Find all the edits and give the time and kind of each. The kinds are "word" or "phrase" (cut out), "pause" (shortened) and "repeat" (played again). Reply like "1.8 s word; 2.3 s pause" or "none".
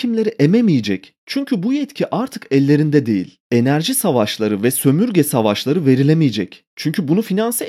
3.4 s pause; 6.7 s pause